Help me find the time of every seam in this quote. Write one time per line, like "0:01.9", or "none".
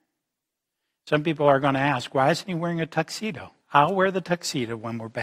0:03.6